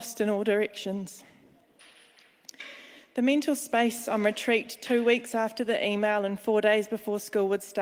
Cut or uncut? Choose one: uncut